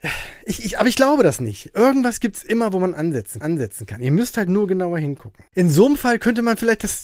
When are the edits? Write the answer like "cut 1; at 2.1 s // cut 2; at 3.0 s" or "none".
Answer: cut 1; at 3.4 s // cut 2; at 5.5 s